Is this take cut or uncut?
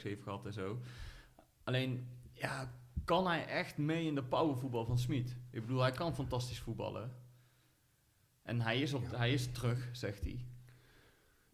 uncut